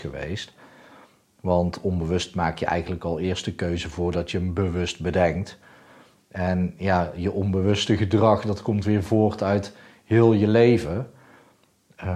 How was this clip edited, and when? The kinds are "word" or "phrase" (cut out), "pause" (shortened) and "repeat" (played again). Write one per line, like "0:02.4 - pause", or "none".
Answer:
none